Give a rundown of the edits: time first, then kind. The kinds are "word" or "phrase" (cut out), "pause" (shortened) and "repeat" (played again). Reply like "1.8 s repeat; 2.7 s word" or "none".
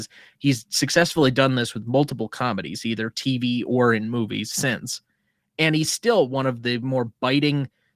none